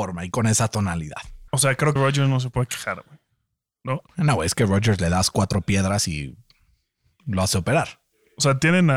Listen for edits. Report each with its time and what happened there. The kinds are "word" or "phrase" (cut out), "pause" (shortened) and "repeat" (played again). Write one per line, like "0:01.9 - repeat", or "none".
0:01.5 - pause
0:02.0 - word
0:04.1 - pause